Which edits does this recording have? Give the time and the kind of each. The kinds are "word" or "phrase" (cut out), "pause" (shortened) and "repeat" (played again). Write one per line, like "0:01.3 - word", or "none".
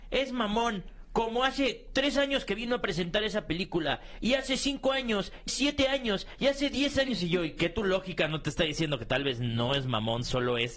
0:05.5 - word